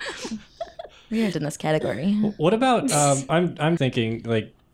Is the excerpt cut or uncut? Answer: cut